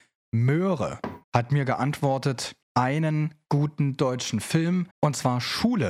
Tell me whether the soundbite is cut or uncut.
cut